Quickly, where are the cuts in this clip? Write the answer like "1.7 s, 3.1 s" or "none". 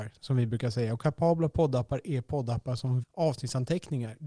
3.0 s